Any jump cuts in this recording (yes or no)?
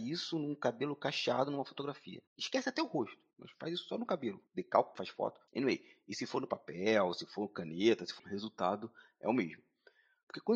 yes